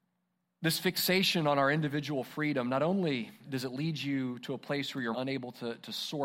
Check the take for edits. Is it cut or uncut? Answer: cut